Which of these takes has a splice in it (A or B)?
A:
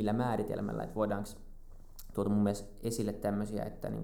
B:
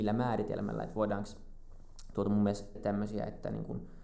B